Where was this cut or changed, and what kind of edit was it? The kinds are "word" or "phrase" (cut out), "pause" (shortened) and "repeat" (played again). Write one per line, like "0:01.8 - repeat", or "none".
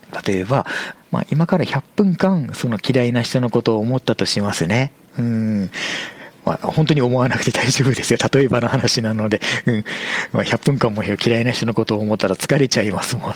0:00.9 - phrase

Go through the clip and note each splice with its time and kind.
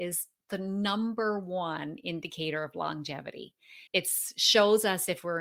0:03.9 - pause

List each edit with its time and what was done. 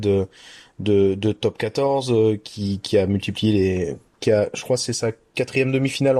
none

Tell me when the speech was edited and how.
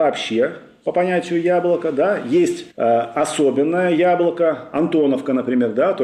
0:02.7 - pause

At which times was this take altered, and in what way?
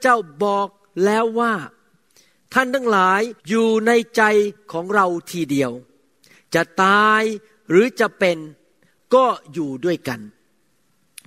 0:03.4 - pause

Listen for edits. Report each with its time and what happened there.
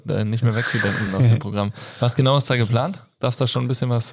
0:01.1 - word

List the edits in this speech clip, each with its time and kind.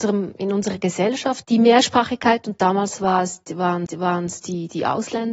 0:01.4 - word
0:03.9 - repeat

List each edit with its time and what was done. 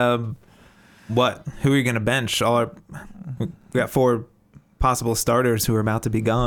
none

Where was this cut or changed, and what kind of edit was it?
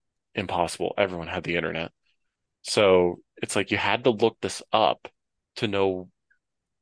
none

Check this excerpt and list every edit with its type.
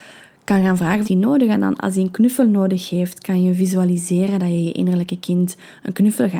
0:01.0 - phrase

